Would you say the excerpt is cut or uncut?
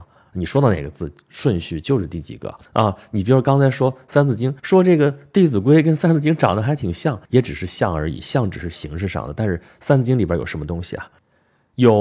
cut